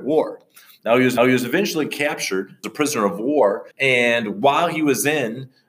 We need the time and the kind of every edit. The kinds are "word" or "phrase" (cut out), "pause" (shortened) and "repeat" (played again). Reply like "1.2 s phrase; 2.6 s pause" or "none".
1.2 s repeat; 2.6 s word; 3.7 s pause